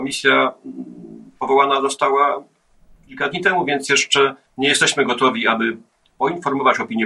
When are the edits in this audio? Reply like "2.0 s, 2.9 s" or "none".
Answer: 4.5 s